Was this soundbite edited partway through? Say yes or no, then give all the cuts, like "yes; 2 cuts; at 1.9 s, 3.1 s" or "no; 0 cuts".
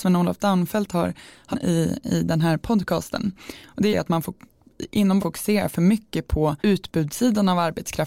yes; 4 cuts; at 1.5 s, 3.9 s, 5.2 s, 6.6 s